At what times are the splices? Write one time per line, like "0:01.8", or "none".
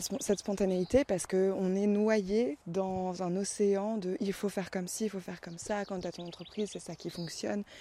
0:02.6